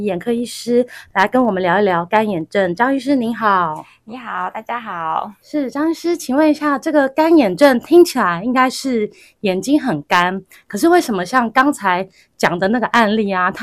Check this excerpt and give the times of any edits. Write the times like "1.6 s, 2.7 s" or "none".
none